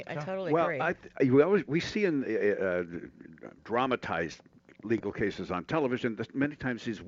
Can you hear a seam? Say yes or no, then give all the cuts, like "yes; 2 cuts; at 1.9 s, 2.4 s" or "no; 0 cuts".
yes; 1 cut; at 3.6 s